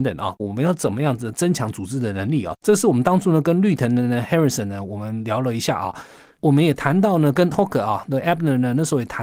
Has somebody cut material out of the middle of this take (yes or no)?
yes